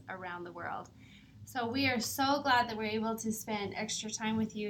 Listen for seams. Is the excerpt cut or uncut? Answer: uncut